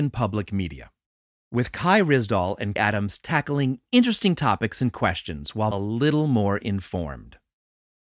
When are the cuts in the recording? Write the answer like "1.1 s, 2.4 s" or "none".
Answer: 2.8 s, 5.7 s